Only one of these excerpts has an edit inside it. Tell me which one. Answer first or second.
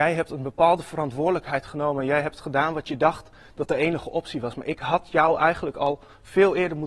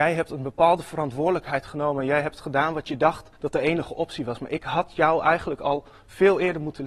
second